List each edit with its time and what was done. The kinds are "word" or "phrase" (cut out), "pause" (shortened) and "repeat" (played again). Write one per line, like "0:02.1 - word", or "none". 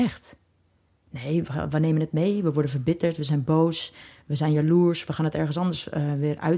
none

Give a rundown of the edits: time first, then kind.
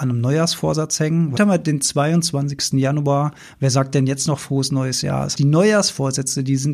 0:01.4 - phrase
0:05.3 - word

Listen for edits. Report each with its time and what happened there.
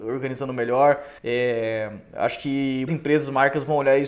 0:01.2 - pause
0:02.9 - word

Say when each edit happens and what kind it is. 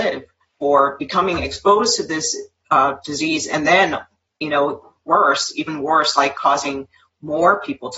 none

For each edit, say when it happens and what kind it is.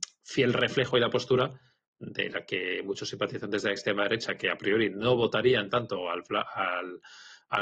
none

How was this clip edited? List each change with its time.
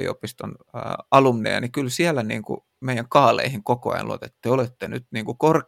none

